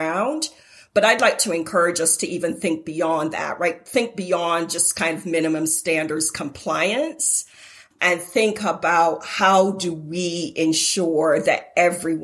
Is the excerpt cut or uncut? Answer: uncut